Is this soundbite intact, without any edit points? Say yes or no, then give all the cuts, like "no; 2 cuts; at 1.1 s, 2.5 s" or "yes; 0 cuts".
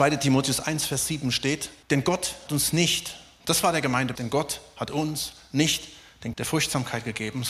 no; 4 cuts; at 1.8 s, 2.5 s, 4.1 s, 6.3 s